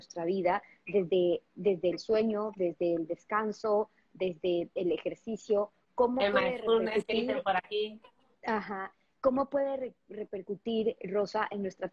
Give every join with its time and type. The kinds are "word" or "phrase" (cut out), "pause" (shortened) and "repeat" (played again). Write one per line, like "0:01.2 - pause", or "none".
none